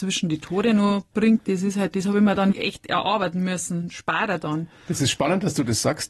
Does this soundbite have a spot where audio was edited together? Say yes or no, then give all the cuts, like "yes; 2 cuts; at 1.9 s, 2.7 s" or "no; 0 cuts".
yes; 2 cuts; at 1.9 s, 2.5 s